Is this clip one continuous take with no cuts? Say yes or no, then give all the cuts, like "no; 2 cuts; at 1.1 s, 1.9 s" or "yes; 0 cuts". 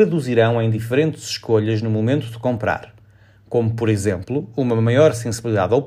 yes; 0 cuts